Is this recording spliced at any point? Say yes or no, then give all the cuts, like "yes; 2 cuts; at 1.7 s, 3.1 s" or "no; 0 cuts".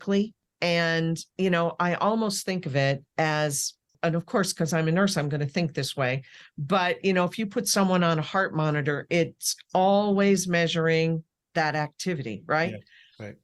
no; 0 cuts